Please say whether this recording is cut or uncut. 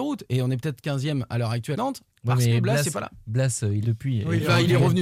cut